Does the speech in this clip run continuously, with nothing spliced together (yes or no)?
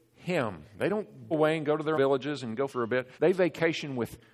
no